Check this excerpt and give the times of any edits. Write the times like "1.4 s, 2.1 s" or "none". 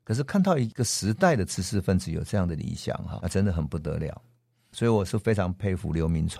3.2 s

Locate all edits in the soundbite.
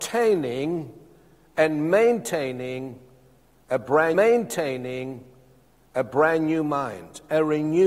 4.1 s

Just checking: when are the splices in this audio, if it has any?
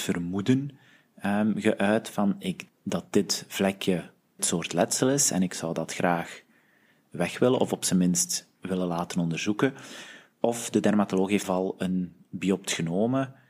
2.7 s, 4.4 s, 11.4 s

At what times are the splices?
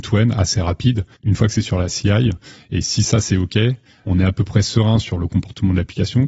1.1 s, 4.0 s

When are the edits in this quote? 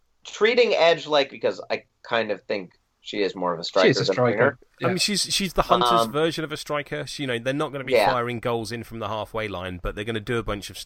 1.3 s

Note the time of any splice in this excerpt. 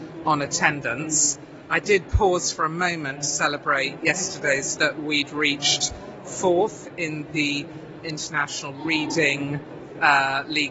4.8 s, 8.0 s

